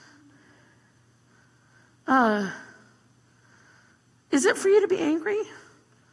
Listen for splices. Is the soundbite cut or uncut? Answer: cut